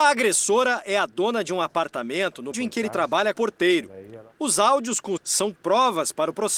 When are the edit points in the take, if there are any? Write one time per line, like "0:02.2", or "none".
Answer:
0:02.5
0:03.3
0:05.2